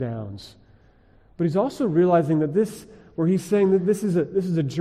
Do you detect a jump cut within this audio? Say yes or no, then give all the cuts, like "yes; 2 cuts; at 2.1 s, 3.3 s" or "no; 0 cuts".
no; 0 cuts